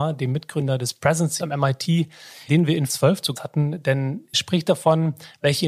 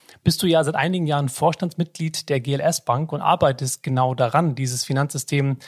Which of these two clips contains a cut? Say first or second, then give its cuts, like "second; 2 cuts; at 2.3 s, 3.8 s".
first; 5 cuts; at 1.4 s, 2.5 s, 2.9 s, 3.3 s, 4.3 s